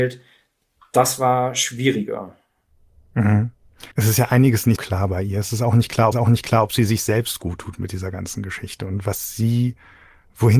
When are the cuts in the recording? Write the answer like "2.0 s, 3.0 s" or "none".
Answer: 3.9 s, 4.8 s, 6.1 s